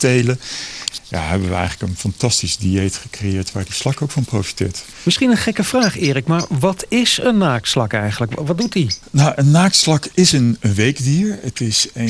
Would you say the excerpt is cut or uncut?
uncut